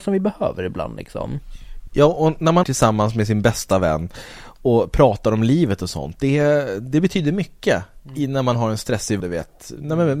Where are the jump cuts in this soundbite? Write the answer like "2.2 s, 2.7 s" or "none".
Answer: 2.6 s, 9.2 s

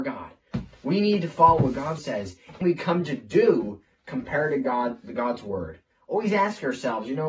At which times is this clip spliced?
2.0 s, 2.6 s

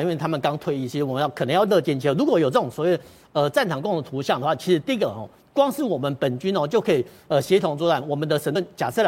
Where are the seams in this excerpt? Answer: none

